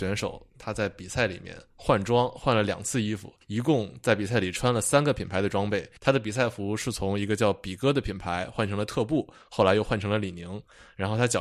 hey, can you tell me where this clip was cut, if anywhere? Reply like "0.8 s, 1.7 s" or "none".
3.4 s, 6.0 s